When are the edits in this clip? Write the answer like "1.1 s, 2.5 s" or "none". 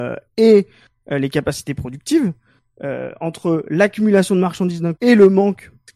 5.0 s